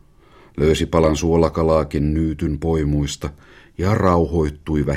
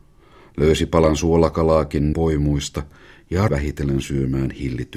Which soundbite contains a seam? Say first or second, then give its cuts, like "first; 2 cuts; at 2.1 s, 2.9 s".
second; 2 cuts; at 2.1 s, 3.5 s